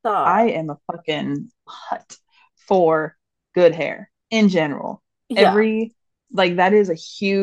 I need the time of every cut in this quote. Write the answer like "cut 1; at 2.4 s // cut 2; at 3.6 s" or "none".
cut 1; at 1.7 s